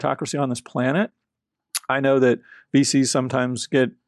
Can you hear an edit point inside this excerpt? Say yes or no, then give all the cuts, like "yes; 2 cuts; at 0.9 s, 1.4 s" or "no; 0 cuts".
no; 0 cuts